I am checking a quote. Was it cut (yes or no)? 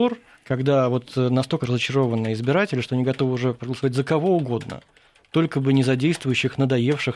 yes